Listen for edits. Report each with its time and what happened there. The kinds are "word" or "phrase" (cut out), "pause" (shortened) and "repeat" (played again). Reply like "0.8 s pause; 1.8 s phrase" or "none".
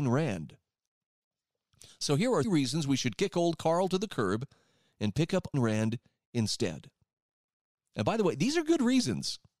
2.4 s word; 5.5 s word